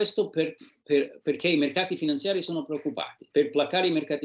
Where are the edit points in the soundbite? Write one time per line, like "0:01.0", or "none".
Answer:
0:03.3